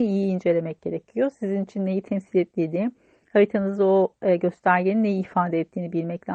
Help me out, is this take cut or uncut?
uncut